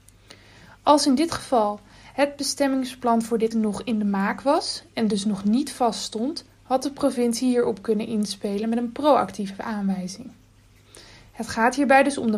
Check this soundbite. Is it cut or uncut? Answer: cut